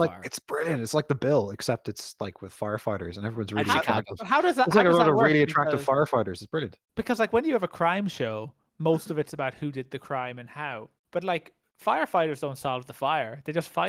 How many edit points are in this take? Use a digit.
2